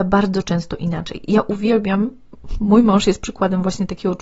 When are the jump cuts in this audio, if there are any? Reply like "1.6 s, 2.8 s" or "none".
none